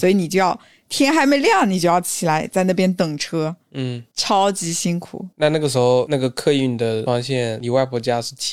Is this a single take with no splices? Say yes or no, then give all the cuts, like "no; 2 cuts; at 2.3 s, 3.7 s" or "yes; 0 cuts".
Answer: no; 1 cut; at 5.3 s